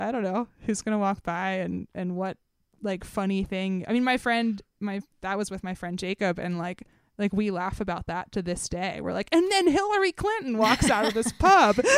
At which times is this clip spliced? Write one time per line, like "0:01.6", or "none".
none